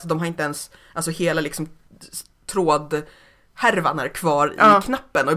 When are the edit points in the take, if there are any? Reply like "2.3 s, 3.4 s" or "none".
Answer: none